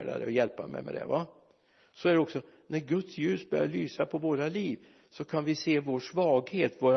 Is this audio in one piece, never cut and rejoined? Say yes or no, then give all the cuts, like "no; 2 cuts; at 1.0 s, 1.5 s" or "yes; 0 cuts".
yes; 0 cuts